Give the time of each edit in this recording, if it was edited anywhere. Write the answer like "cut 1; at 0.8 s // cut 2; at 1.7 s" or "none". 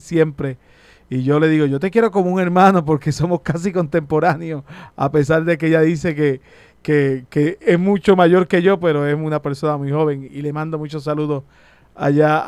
cut 1; at 10.3 s